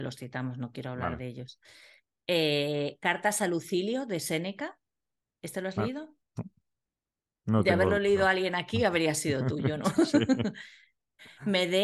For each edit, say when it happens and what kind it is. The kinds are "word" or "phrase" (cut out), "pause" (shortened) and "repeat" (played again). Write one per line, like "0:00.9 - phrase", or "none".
none